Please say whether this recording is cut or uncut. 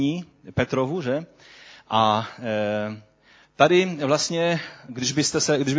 uncut